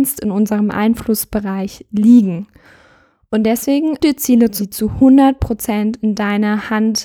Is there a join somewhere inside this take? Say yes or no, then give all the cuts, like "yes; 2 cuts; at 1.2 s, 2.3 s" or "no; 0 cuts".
yes; 2 cuts; at 4.0 s, 4.6 s